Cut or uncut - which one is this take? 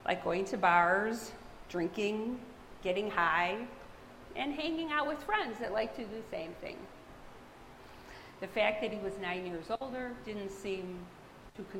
uncut